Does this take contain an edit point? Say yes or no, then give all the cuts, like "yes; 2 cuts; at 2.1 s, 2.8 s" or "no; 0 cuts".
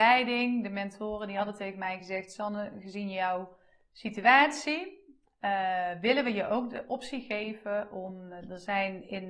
no; 0 cuts